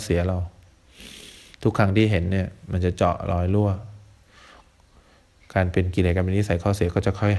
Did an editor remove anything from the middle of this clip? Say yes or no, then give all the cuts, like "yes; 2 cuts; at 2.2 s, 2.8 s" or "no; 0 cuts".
no; 0 cuts